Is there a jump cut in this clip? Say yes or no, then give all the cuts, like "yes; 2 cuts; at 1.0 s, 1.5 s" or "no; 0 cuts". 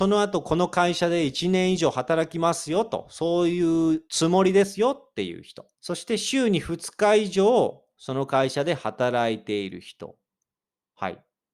yes; 2 cuts; at 4.1 s, 5.7 s